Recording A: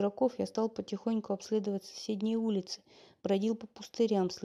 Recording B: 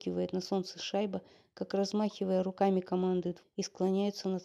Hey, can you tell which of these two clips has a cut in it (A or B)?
B